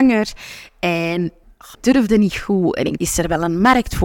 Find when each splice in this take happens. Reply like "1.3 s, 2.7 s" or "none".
1.4 s, 1.7 s, 3.0 s